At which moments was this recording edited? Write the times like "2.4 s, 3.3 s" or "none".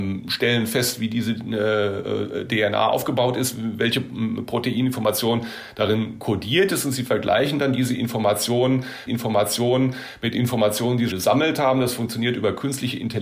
9.1 s, 11.1 s